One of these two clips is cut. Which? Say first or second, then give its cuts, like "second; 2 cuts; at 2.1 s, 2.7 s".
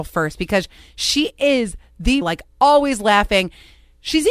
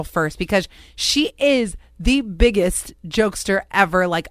first; 1 cut; at 2.2 s